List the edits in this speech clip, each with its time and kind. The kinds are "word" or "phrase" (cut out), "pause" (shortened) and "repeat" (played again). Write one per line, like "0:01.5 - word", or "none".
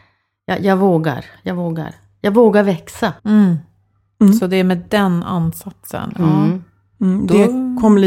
0:03.2 - pause